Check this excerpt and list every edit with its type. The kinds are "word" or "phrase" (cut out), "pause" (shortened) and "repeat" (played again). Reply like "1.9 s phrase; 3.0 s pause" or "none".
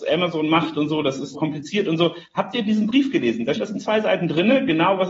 1.3 s word; 3.6 s word